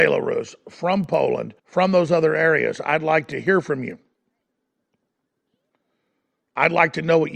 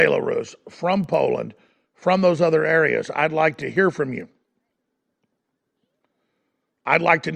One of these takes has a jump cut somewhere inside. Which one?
first; 1 cut; at 1.6 s

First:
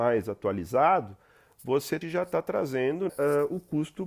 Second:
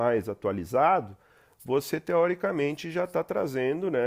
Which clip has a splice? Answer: first; 2 cuts; at 2.0 s, 3.1 s

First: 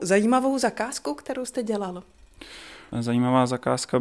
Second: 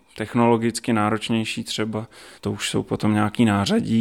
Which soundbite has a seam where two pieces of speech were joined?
second; 1 cut; at 2.4 s

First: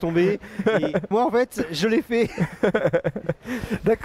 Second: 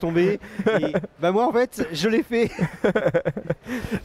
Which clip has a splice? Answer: first; 1 cut; at 1.1 s

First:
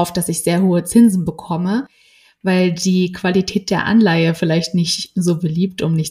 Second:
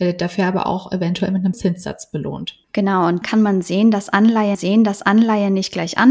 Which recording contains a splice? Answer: second; 4 cuts; at 1.5 s, 2.6 s, 3.2 s, 4.5 s

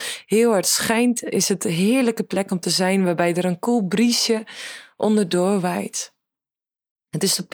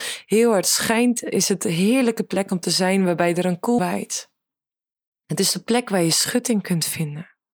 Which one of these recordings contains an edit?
second; 1 cut; at 3.8 s

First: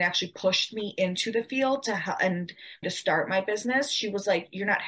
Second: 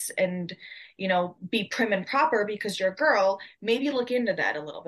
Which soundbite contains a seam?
first; 1 cut; at 2.8 s

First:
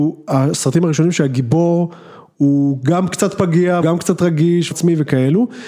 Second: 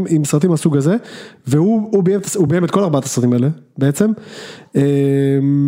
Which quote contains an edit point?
first; 2 cuts; at 3.8 s, 4.7 s

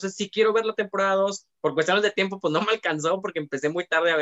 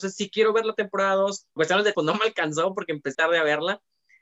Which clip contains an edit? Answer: second; 3 cuts; at 1.6 s, 1.9 s, 3.1 s

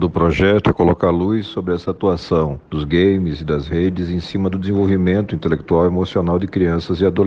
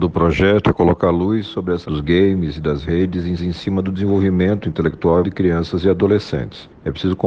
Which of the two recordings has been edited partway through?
second; 3 cuts; at 1.8 s, 3.4 s, 5.2 s

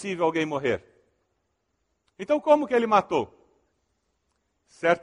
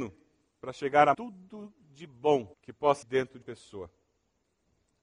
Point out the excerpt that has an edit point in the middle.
second; 4 cuts; at 1.1 s, 2.5 s, 3.0 s, 3.4 s

